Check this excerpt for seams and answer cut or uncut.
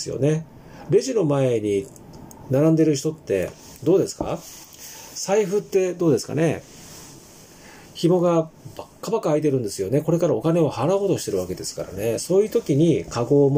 uncut